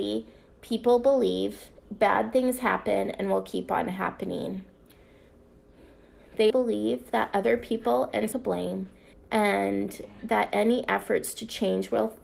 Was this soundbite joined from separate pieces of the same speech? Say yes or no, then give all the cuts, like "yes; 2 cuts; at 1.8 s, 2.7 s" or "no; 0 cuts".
yes; 4 cuts; at 1.8 s, 6.5 s, 8.3 s, 9.1 s